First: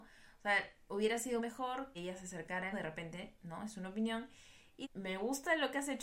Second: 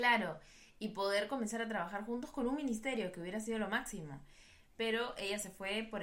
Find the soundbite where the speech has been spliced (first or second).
first